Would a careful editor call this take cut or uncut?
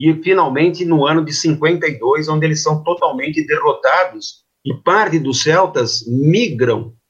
uncut